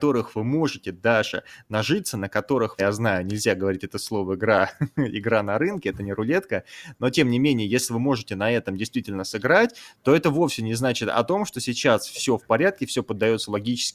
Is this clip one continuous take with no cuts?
no; 1 cut; at 2.8 s

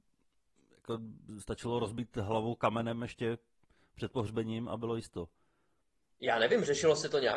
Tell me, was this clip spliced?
no; 0 cuts

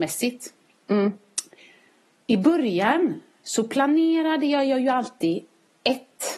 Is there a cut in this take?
no; 0 cuts

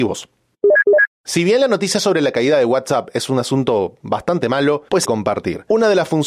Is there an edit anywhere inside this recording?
yes; 1 cut; at 5.0 s

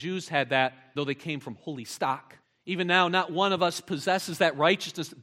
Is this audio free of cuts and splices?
no; 2 cuts; at 1.0 s, 2.4 s

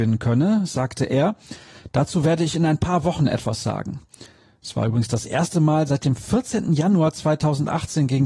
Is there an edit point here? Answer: no; 0 cuts

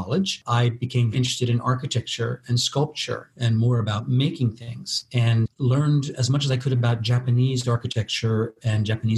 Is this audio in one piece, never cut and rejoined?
no; 1 cut; at 1.1 s

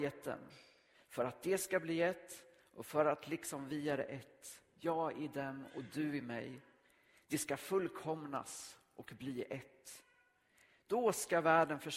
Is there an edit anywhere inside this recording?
no; 0 cuts

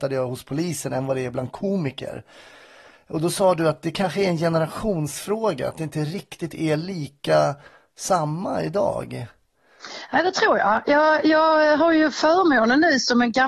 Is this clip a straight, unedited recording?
yes; 0 cuts

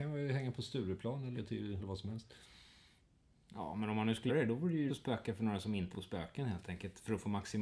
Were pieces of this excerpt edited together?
yes; 5 cuts; at 1.3 s, 1.8 s, 4.3 s, 4.9 s, 5.9 s

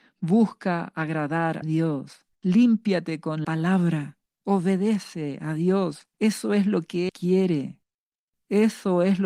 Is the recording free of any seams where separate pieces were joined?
no; 6 cuts; at 1.6 s, 2.3 s, 3.4 s, 4.3 s, 6.1 s, 7.1 s

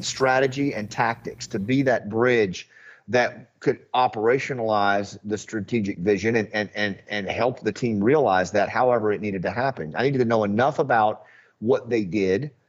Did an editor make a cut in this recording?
no; 0 cuts

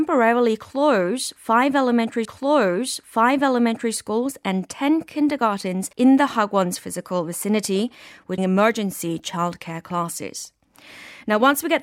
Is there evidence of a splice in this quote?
yes; 3 cuts; at 2.2 s, 5.9 s, 8.4 s

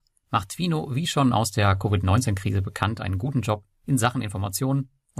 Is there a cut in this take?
no; 0 cuts

